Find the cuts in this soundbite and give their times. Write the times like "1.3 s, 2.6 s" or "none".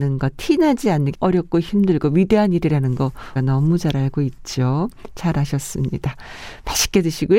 1.1 s, 3.4 s

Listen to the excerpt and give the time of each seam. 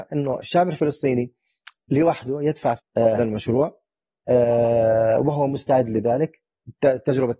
2.8 s, 3.2 s

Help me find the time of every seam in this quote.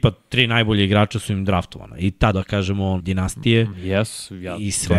2.3 s, 3.0 s

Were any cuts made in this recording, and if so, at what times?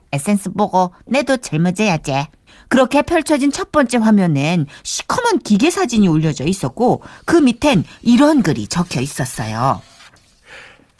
2.5 s

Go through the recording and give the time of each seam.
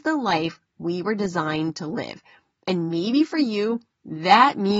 none

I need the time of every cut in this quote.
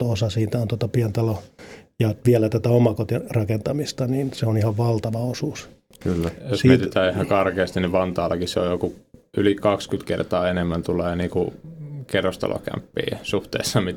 none

